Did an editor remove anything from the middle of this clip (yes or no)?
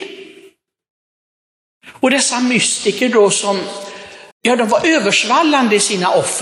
yes